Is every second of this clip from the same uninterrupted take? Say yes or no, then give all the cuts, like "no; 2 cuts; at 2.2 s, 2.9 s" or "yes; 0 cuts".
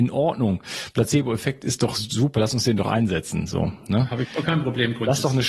yes; 0 cuts